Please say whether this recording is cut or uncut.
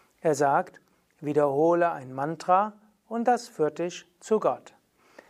uncut